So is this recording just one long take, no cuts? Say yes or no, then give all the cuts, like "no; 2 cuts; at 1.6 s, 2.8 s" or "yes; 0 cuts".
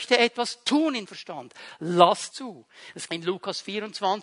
no; 3 cuts; at 1.1 s, 2.3 s, 3.1 s